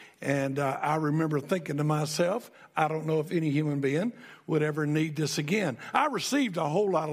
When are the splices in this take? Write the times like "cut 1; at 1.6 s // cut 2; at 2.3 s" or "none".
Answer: none